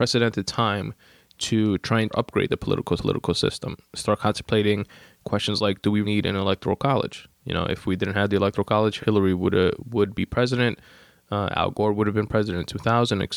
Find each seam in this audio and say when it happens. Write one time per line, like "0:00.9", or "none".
0:02.1
0:03.0
0:06.0
0:09.0